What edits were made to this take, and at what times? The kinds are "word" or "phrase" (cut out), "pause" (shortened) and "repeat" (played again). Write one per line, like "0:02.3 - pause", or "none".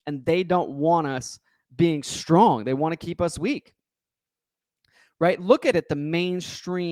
0:05.7 - word